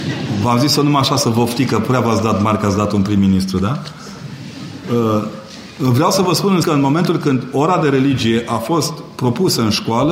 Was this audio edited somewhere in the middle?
yes; 1 cut; at 6.6 s

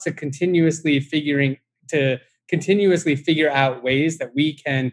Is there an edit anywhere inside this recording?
no; 0 cuts

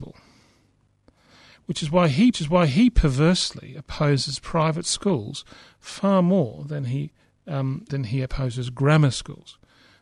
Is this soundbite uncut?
no; 2 cuts; at 2.3 s, 7.9 s

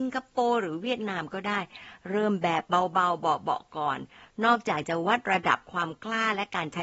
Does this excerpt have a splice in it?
no; 0 cuts

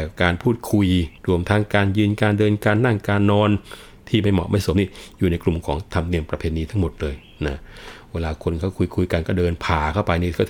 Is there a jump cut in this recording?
yes; 1 cut; at 1.2 s

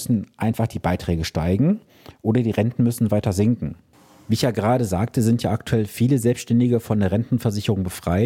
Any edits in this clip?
no; 0 cuts

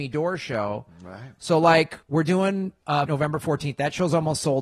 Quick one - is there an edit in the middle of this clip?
yes; 2 cuts; at 2.0 s, 3.1 s

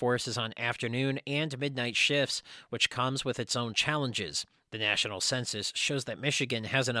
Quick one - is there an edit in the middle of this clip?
no; 0 cuts

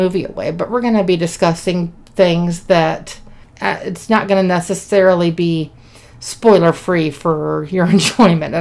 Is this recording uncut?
yes; 0 cuts

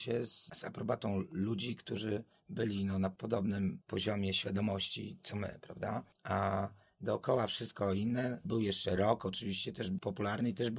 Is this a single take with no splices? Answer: yes; 0 cuts

